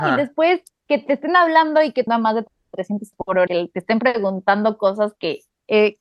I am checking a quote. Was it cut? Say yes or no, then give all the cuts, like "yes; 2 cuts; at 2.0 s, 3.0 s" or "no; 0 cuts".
yes; 3 cuts; at 2.1 s, 3.1 s, 3.5 s